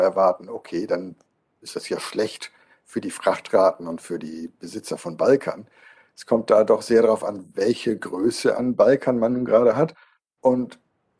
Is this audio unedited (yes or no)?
yes